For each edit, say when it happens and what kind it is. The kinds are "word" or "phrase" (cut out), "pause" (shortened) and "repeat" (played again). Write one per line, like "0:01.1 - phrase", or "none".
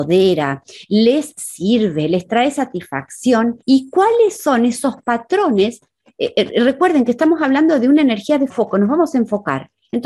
0:03.6 - pause
0:08.5 - word